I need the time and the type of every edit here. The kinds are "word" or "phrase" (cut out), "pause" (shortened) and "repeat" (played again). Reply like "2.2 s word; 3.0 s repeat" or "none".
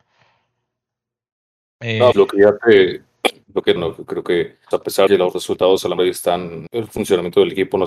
2.1 s word; 3.8 s word; 4.7 s word; 5.1 s word; 6.0 s word; 6.7 s word